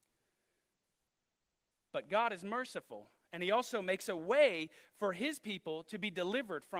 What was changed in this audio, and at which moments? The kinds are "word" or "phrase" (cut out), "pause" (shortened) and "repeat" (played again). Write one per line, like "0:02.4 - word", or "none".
none